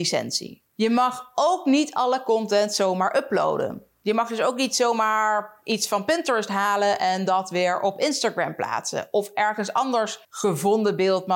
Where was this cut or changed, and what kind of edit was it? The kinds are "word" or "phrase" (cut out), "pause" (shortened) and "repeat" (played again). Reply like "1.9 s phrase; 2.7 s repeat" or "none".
10.2 s pause